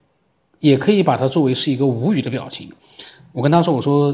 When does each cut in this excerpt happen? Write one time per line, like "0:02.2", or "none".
0:02.8